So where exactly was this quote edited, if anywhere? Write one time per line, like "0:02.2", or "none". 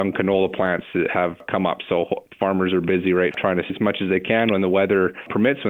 0:03.3
0:03.7